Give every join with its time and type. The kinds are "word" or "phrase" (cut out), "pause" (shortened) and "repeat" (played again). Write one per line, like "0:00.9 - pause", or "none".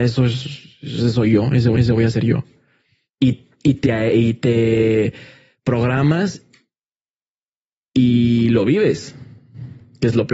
0:01.7 - repeat